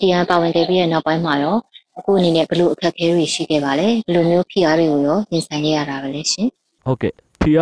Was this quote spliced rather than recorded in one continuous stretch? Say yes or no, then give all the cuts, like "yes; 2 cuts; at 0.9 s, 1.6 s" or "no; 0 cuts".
yes; 2 cuts; at 1.9 s, 6.6 s